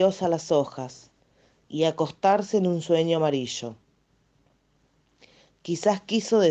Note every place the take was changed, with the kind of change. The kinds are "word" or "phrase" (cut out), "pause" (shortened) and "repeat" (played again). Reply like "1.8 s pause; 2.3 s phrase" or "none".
none